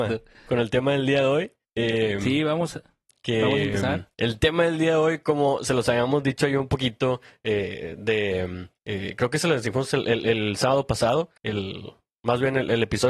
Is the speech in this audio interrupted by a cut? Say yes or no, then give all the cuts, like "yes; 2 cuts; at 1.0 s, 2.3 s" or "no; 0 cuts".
yes; 4 cuts; at 1.6 s, 4.1 s, 8.8 s, 11.4 s